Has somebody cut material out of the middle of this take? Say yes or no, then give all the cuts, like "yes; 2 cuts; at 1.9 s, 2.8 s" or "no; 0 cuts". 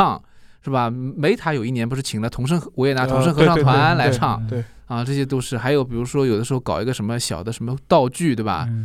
no; 0 cuts